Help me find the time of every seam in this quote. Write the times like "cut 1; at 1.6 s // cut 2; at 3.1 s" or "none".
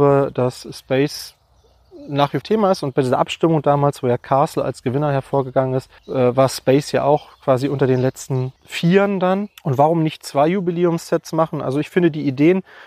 cut 1; at 2.4 s // cut 2; at 6.0 s // cut 3; at 8.6 s // cut 4; at 9.6 s